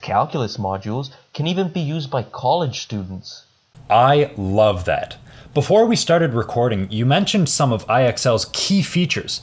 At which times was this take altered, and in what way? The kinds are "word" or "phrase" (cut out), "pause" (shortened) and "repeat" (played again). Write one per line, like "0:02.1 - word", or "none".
none